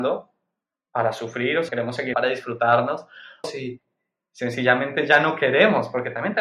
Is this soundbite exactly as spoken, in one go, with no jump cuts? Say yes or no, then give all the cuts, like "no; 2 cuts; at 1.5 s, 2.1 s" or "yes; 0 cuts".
no; 3 cuts; at 1.7 s, 2.1 s, 3.4 s